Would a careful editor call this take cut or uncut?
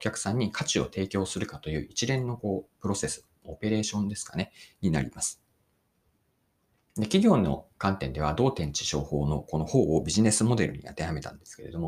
uncut